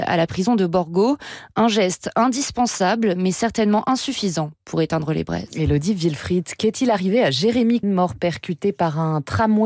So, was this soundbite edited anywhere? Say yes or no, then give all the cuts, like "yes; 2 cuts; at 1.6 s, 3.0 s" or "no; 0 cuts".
yes; 1 cut; at 7.8 s